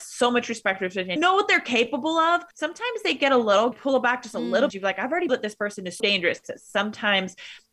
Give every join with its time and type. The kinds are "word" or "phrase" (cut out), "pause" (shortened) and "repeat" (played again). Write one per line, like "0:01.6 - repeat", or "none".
0:01.2 - word
0:02.5 - pause
0:03.7 - phrase
0:04.7 - phrase
0:05.3 - phrase
0:06.0 - word